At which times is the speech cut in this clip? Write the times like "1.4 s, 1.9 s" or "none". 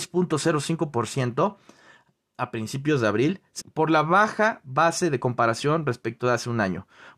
3.6 s